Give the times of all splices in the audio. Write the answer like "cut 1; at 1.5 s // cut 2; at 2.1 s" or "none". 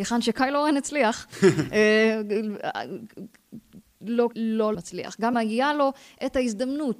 cut 1; at 4.3 s // cut 2; at 4.7 s // cut 3; at 5.3 s

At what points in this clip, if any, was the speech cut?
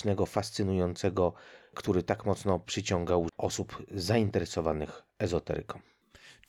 cut 1; at 1.6 s // cut 2; at 3.3 s

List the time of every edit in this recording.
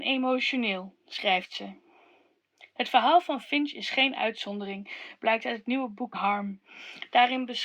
cut 1; at 6.1 s

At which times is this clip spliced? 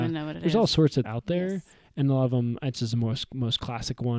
cut 1; at 1.0 s // cut 2; at 2.7 s

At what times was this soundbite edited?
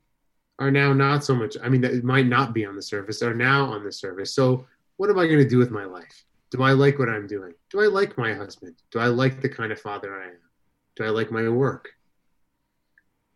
cut 1; at 6.3 s // cut 2; at 7.6 s // cut 3; at 8.8 s

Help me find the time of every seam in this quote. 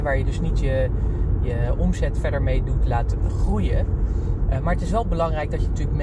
none

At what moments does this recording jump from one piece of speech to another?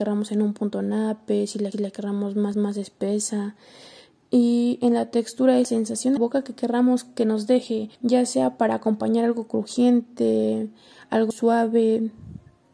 cut 1; at 1.7 s // cut 2; at 2.5 s // cut 3; at 5.6 s // cut 4; at 6.2 s // cut 5; at 7.9 s // cut 6; at 11.3 s

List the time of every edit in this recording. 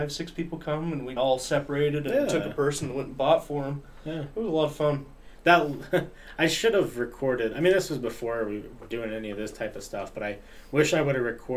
cut 1; at 1.2 s

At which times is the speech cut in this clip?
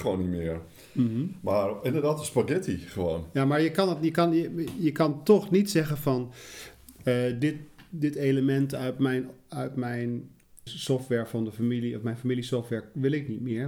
cut 1; at 10.7 s

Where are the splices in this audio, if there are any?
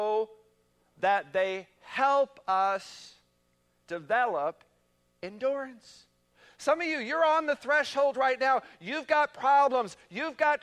none

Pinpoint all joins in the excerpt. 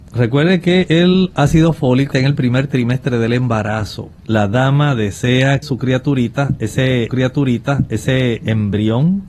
cut 1; at 2.1 s // cut 2; at 4.2 s // cut 3; at 5.6 s // cut 4; at 7.1 s

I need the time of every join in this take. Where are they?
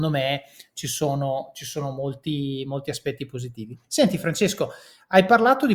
none

